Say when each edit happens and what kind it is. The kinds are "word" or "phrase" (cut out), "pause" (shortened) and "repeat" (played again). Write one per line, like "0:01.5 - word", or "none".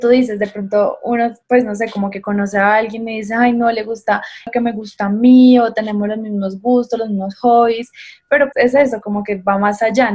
0:01.4 - pause
0:08.5 - word